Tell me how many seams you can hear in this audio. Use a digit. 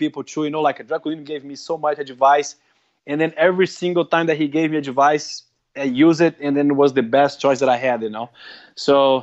0